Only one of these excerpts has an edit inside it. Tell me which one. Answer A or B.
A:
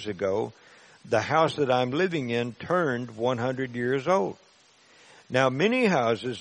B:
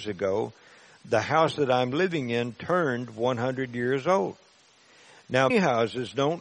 B